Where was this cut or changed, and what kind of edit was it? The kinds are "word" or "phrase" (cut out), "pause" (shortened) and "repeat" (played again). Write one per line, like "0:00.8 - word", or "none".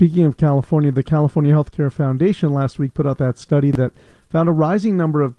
none